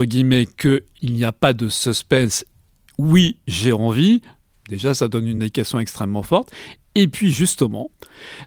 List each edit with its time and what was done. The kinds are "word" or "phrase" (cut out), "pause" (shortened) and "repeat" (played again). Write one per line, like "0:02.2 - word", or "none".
none